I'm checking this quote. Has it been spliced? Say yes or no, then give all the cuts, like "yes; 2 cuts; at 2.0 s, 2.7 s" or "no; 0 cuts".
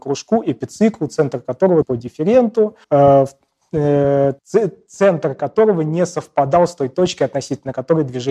yes; 3 cuts; at 1.8 s, 2.8 s, 4.4 s